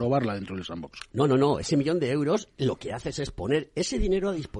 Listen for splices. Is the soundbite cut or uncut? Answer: cut